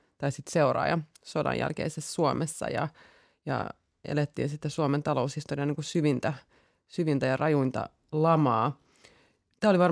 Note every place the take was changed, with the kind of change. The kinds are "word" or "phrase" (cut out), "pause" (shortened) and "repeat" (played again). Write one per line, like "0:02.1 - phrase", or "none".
none